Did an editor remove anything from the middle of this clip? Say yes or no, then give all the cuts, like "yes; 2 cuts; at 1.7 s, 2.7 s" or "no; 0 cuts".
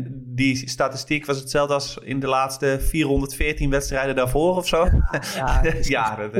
no; 0 cuts